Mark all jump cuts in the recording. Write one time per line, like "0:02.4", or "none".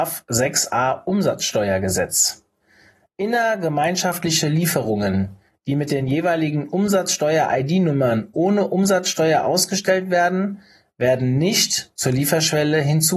none